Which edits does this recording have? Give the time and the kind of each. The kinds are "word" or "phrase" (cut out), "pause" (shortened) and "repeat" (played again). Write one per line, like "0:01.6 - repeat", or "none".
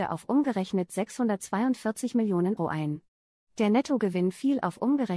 0:02.6 - word

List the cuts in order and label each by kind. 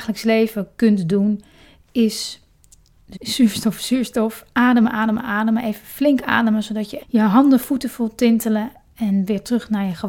0:03.1 - word
0:07.0 - word

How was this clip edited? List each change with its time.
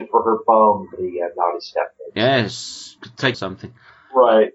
0:00.9 - word
0:03.3 - phrase

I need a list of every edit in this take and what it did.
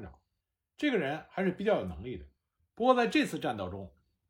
none

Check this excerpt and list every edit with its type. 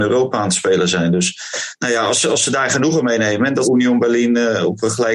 0:03.6 - word

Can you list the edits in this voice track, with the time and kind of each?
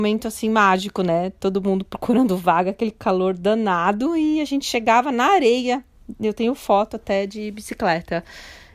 none

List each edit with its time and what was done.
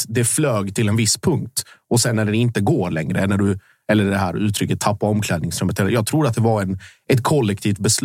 none

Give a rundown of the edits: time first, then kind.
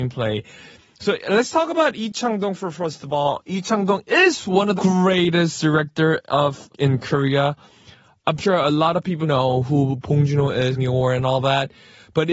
0:04.8 - word
0:06.7 - word
0:08.4 - word
0:09.2 - word
0:10.8 - phrase

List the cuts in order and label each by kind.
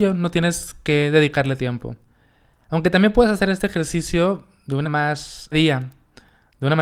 0:01.6 - word
0:04.8 - word
0:05.5 - phrase

